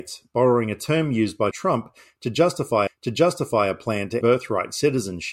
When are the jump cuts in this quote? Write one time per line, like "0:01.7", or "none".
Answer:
0:01.5
0:02.9
0:04.2

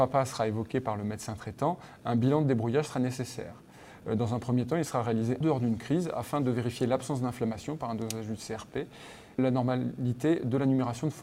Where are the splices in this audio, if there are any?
0:05.4
0:09.4

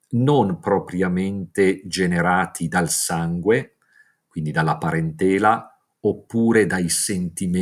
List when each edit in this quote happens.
none

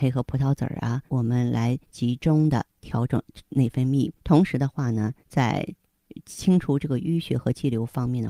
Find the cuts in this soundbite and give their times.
0:01.1
0:01.8
0:04.2
0:05.2

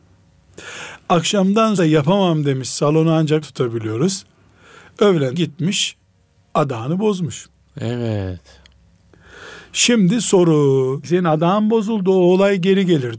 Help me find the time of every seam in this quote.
0:01.8
0:03.4
0:05.3
0:11.0

